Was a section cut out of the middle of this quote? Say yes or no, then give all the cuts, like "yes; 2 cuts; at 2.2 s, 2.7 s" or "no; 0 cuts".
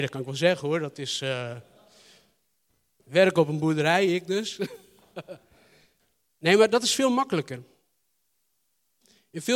no; 0 cuts